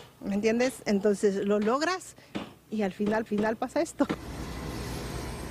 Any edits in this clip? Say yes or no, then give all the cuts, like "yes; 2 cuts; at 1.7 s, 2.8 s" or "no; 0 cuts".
yes; 1 cut; at 3.3 s